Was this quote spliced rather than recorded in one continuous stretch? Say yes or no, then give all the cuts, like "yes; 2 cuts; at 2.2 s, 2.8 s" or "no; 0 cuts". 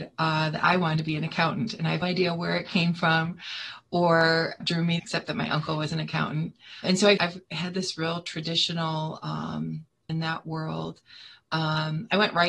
yes; 6 cuts; at 2.0 s, 4.6 s, 5.0 s, 6.8 s, 7.2 s, 10.1 s